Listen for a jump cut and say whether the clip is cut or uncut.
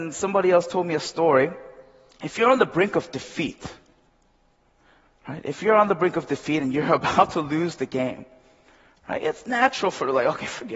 uncut